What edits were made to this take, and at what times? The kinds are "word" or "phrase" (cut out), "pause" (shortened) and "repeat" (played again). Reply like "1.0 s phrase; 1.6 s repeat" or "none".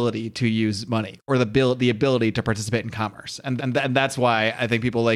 3.6 s repeat